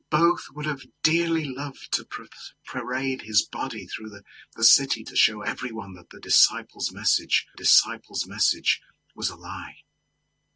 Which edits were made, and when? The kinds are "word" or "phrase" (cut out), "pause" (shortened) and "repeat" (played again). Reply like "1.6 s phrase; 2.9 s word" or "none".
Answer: 7.5 s repeat